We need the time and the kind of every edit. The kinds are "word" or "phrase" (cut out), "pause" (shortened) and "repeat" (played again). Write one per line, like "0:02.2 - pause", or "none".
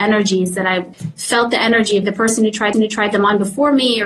0:02.0 - word
0:02.7 - repeat

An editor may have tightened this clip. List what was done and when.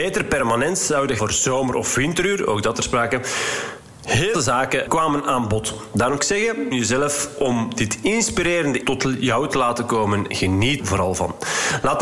0:01.2 - word
0:02.7 - word
0:04.3 - word
0:04.9 - word
0:06.2 - word
0:06.7 - word
0:08.8 - word
0:10.3 - word
0:10.8 - word

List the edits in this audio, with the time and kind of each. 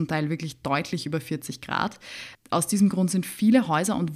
none

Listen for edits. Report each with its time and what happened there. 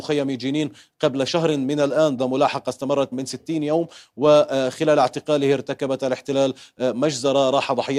0:02.2 - word
0:03.1 - word

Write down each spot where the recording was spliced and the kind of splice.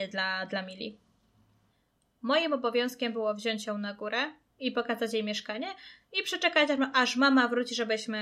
none

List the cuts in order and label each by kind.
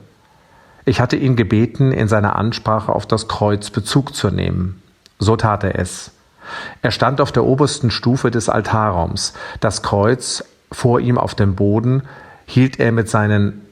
none

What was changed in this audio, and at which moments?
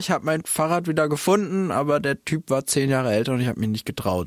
none

